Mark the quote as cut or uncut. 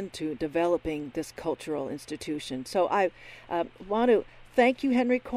uncut